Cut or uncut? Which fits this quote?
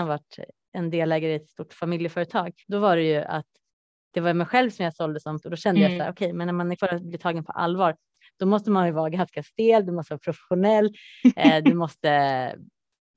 cut